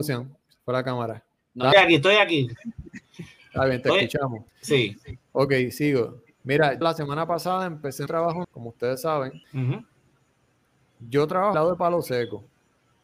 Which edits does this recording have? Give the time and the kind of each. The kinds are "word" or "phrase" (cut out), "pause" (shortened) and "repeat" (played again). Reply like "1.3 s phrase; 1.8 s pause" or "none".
1.7 s word; 4.5 s pause; 6.8 s word; 8.1 s word; 8.4 s word; 9.4 s pause; 11.5 s word